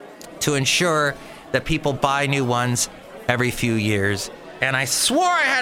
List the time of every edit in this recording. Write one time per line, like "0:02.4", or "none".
none